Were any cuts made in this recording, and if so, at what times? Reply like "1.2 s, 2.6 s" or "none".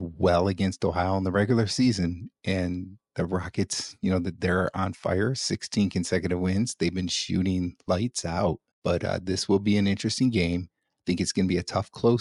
8.7 s